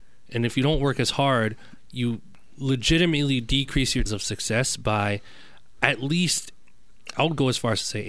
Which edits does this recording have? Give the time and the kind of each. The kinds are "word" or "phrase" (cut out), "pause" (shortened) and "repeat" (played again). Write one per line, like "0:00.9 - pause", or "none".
0:04.1 - word